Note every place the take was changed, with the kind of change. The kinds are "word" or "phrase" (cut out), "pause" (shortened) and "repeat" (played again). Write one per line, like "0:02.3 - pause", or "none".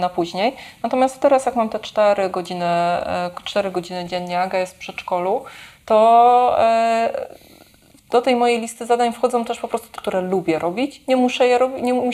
0:10.0 - word